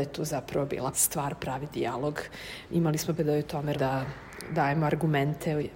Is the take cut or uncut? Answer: cut